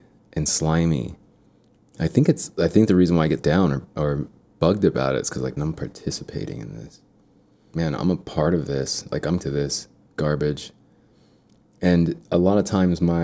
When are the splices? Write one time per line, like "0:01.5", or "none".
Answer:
0:03.4
0:05.6
0:07.7
0:09.4